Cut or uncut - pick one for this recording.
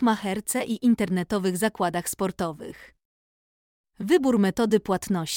uncut